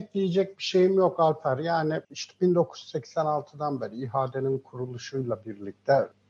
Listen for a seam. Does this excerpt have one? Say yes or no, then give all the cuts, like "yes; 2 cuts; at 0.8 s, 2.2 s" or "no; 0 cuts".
yes; 1 cut; at 2.0 s